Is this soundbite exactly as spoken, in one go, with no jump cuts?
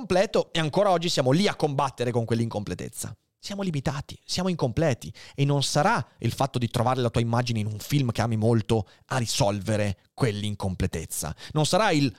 yes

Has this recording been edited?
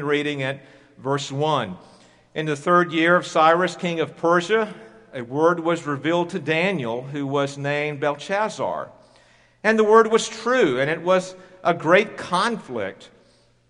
no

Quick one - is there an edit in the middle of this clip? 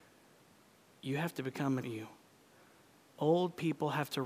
yes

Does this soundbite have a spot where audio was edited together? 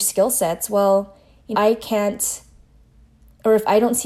yes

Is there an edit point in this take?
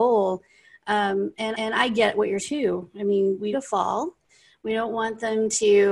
yes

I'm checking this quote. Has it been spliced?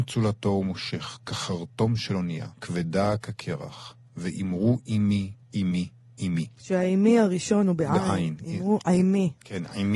yes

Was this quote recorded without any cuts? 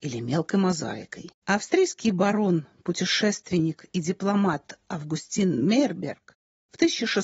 no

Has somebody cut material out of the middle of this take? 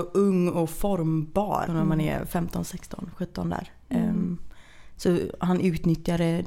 yes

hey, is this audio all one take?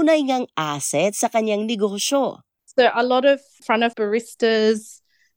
no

